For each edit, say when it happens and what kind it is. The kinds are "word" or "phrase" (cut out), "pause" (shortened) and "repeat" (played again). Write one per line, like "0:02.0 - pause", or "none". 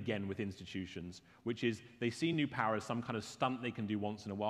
none